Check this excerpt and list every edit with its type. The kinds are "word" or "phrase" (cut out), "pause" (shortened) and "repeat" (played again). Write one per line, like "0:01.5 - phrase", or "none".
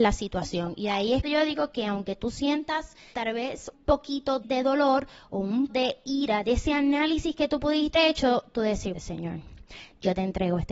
0:01.2 - word
0:03.1 - word
0:03.7 - word
0:04.4 - word
0:05.7 - word
0:06.4 - word
0:07.9 - word
0:08.9 - word